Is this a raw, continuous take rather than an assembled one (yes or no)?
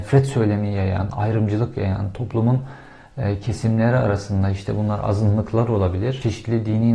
yes